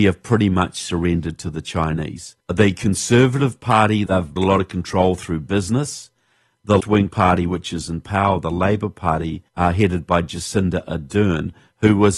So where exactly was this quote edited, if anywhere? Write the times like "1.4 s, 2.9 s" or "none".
2.4 s, 4.1 s, 4.4 s, 6.8 s, 9.5 s